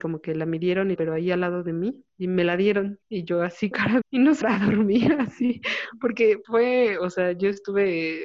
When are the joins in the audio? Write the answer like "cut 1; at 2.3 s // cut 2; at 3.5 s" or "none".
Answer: cut 1; at 1.0 s // cut 2; at 2.1 s // cut 3; at 3.0 s // cut 4; at 3.7 s // cut 5; at 4.0 s // cut 6; at 4.4 s // cut 7; at 6.4 s